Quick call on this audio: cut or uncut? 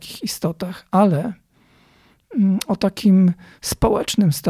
uncut